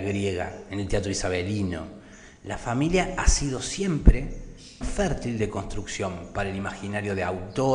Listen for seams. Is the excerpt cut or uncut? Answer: cut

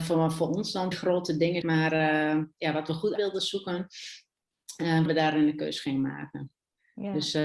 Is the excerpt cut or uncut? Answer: cut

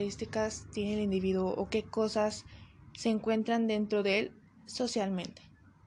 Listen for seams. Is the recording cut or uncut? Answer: uncut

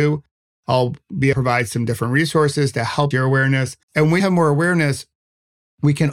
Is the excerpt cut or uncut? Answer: cut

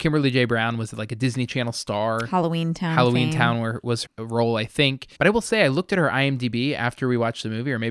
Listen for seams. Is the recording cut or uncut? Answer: cut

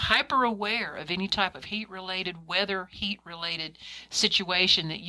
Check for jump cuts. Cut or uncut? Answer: uncut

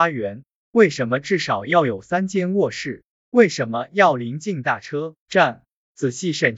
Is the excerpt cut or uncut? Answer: cut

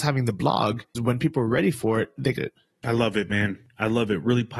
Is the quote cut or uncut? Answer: cut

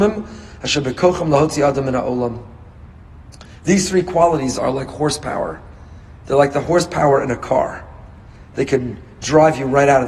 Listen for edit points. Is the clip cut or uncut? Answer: uncut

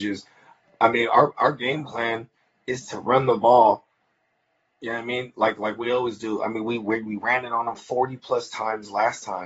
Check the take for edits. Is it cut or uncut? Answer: uncut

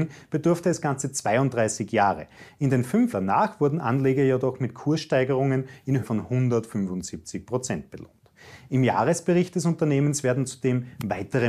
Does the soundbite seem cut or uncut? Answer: cut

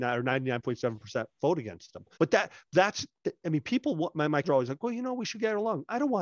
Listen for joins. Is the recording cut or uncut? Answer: cut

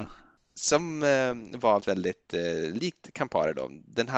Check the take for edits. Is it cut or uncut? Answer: cut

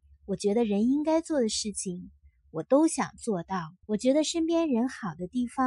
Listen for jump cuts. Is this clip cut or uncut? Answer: cut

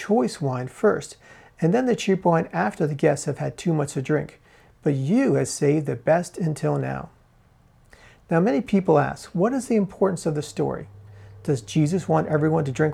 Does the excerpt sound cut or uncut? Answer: uncut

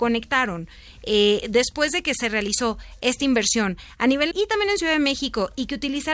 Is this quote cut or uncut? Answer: cut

